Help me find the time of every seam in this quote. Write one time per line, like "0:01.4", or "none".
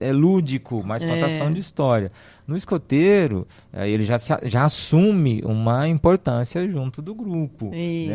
none